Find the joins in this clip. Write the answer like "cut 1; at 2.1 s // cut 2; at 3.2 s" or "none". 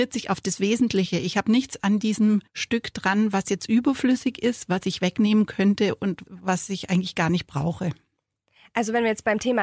cut 1; at 2.5 s